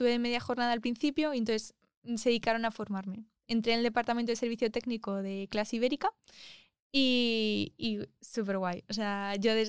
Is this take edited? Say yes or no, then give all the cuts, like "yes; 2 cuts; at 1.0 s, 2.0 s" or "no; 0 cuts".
no; 0 cuts